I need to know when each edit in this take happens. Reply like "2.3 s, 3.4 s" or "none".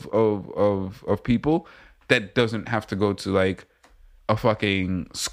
none